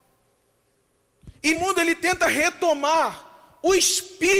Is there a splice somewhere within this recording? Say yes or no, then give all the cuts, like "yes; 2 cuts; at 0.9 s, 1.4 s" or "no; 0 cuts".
yes; 1 cut; at 1.5 s